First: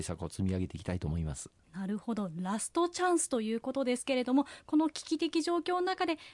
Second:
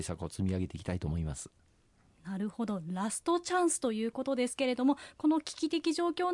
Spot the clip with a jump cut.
first; 1 cut; at 1.6 s

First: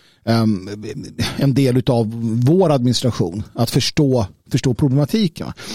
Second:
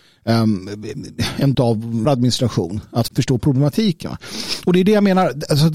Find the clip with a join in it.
second; 3 cuts; at 1.5 s, 2.0 s, 3.1 s

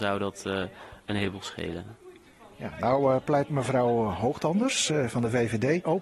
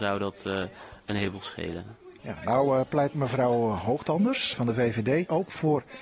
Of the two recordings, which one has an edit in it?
second; 2 cuts; at 2.2 s, 4.5 s

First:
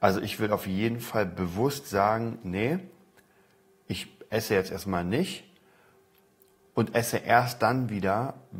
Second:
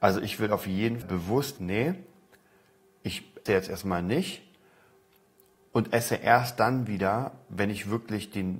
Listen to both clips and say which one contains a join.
second; 3 cuts; at 1.0 s, 1.6 s, 3.5 s

